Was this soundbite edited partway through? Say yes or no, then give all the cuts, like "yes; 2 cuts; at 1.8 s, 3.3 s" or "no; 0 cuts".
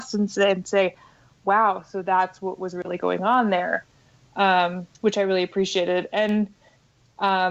yes; 1 cut; at 4.9 s